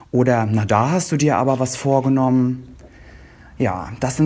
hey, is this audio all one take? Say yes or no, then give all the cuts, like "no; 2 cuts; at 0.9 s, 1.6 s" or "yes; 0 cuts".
yes; 0 cuts